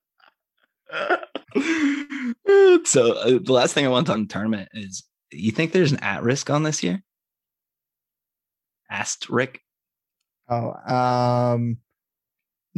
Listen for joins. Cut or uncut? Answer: cut